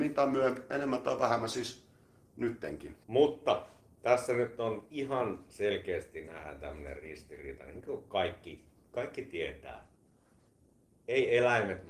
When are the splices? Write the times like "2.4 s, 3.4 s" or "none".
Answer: 3.0 s